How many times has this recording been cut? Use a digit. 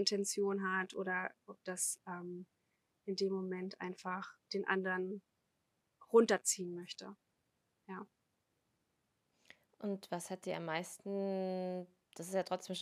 1